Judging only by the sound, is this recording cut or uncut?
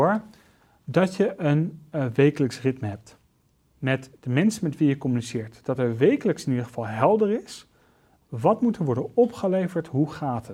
uncut